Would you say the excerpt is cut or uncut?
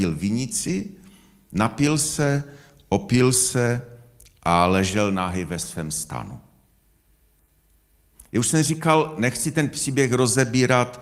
uncut